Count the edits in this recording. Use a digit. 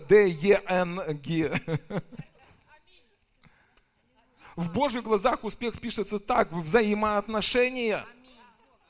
0